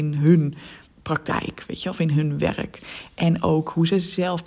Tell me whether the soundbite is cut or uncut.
cut